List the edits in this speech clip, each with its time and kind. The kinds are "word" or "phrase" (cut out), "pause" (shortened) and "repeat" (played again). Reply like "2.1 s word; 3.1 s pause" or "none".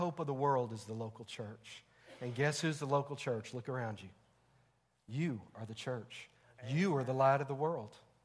none